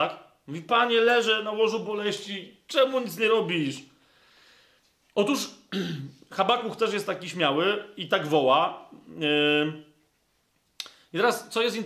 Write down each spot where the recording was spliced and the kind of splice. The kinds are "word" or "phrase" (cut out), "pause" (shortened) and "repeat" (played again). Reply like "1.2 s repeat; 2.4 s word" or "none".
none